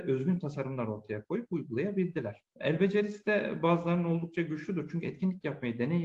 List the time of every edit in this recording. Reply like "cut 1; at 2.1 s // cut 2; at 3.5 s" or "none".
cut 1; at 2.5 s